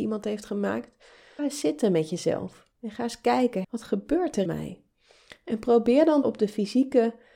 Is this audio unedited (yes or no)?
no